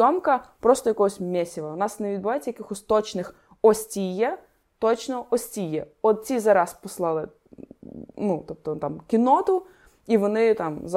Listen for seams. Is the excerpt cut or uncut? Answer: uncut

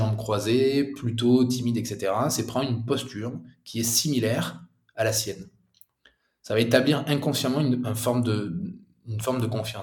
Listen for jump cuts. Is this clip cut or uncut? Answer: uncut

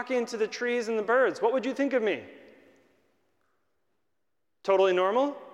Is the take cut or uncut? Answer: uncut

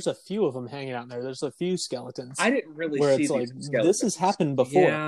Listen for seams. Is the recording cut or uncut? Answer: uncut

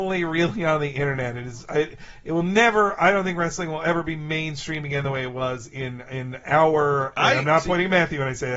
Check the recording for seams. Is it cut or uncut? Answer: uncut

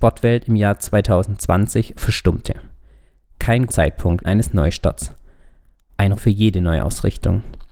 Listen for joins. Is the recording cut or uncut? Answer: cut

